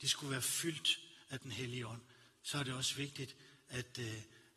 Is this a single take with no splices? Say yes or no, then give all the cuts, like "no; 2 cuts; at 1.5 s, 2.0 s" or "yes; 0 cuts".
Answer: yes; 0 cuts